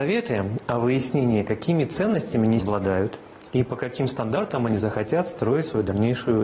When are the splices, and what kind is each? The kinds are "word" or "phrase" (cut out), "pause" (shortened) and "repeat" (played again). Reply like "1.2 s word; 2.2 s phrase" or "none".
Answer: 2.6 s word

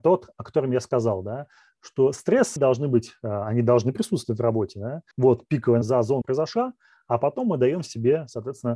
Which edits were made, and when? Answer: 2.6 s word; 5.1 s pause; 5.8 s phrase; 6.2 s phrase

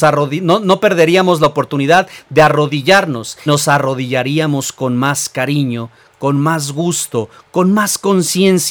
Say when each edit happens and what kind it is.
3.5 s word

